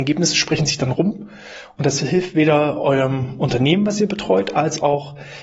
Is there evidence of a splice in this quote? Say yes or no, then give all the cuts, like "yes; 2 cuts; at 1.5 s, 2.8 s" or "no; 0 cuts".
no; 0 cuts